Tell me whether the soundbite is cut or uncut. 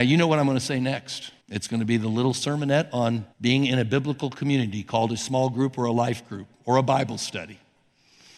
cut